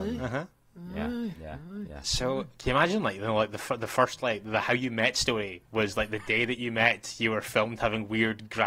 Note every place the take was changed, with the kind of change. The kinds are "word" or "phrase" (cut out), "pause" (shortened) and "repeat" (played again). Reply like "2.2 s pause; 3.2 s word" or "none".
none